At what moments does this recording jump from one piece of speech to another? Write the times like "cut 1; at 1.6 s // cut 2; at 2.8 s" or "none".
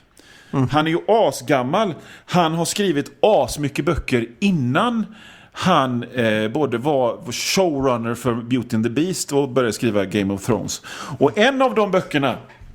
none